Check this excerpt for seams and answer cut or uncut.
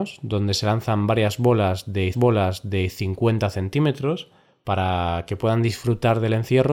cut